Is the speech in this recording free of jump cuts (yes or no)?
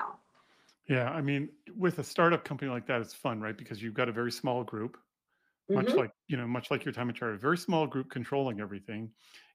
yes